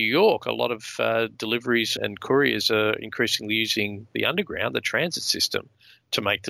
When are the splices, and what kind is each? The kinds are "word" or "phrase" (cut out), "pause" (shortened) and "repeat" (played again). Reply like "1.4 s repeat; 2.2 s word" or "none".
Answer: 2.0 s word